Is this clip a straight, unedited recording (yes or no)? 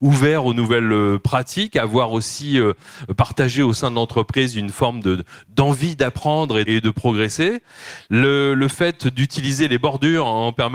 no